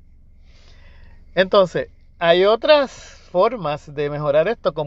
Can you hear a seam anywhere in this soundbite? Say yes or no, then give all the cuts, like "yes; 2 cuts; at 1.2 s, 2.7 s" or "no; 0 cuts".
no; 0 cuts